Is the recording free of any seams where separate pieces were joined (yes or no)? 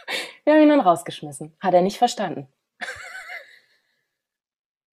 yes